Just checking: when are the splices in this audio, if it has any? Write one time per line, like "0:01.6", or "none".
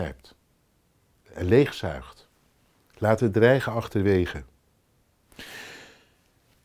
none